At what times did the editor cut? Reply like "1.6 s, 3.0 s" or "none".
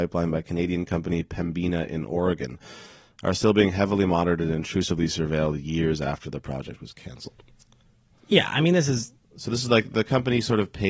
none